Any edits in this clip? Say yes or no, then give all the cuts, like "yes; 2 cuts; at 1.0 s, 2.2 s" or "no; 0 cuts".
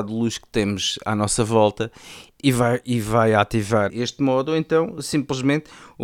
yes; 2 cuts; at 2.4 s, 3.9 s